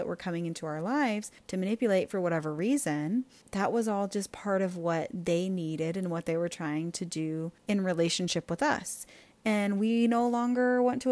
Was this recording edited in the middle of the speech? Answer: yes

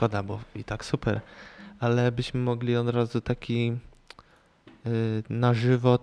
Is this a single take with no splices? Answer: yes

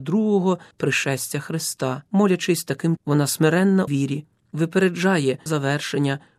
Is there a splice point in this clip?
yes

